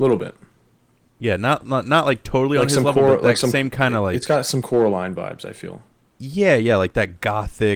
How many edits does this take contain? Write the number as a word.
zero